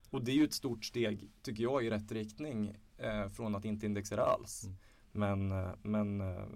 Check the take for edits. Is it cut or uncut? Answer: uncut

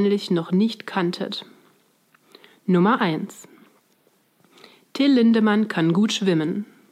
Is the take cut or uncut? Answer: uncut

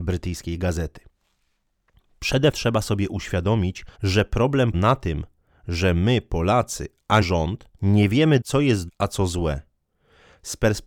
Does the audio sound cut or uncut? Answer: cut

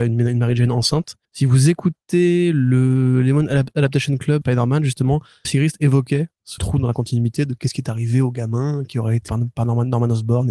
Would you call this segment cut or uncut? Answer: cut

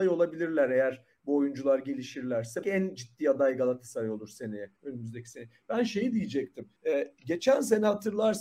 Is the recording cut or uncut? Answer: cut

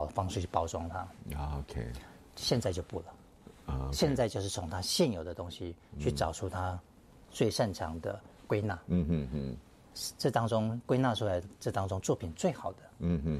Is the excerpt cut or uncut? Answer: uncut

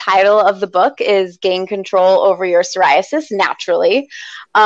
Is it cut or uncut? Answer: uncut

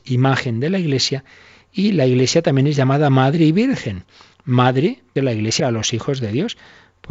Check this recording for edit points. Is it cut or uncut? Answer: cut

